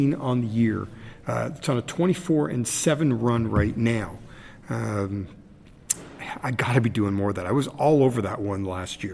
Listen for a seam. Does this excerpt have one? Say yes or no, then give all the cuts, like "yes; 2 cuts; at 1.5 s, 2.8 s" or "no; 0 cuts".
no; 0 cuts